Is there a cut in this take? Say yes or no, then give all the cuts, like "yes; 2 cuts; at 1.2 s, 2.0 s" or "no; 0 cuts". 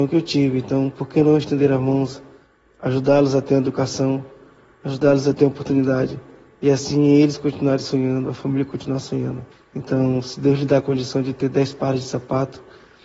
yes; 1 cut; at 9.5 s